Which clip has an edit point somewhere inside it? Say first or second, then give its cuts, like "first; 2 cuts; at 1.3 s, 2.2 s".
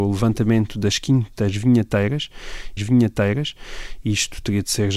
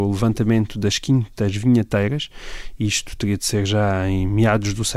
first; 1 cut; at 2.8 s